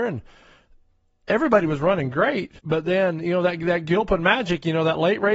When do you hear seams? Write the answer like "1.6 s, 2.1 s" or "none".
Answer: 2.6 s